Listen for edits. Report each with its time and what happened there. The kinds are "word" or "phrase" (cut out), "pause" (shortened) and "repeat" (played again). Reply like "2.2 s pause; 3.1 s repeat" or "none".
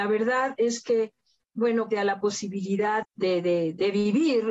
1.9 s phrase; 3.0 s word